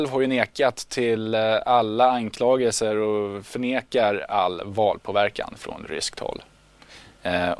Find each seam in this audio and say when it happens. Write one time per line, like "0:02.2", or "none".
none